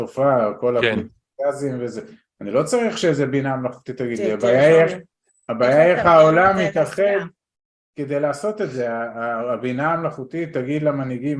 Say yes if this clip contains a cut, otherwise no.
no